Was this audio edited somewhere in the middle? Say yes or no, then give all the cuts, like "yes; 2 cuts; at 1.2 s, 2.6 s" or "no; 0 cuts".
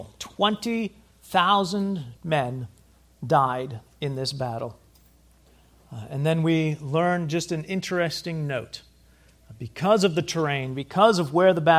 yes; 2 cuts; at 2.2 s, 5.5 s